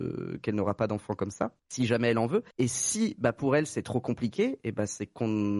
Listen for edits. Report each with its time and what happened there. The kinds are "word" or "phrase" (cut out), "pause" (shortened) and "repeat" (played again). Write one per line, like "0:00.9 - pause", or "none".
0:01.6 - pause
0:02.5 - pause